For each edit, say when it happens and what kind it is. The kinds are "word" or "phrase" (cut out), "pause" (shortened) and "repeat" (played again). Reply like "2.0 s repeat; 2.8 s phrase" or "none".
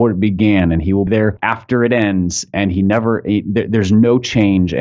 1.1 s word